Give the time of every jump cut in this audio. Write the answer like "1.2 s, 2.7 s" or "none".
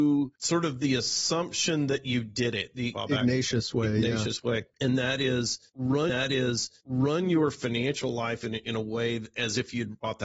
6.1 s